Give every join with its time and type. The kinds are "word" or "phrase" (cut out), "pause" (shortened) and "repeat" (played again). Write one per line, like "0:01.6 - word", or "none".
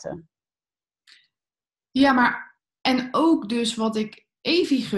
none